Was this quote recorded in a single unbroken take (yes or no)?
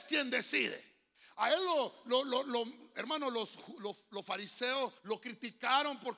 no